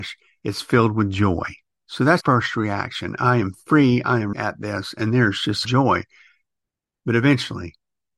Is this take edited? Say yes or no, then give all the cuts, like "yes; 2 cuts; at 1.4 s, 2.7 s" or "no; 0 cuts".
yes; 3 cuts; at 2.2 s, 4.3 s, 5.6 s